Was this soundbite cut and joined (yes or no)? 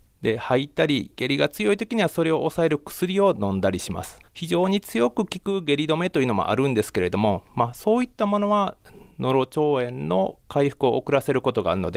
yes